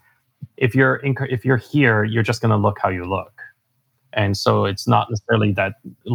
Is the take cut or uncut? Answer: uncut